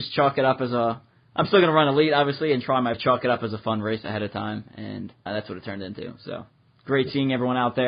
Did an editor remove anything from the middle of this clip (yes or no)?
yes